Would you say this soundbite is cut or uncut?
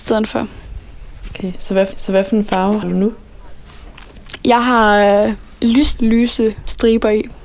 cut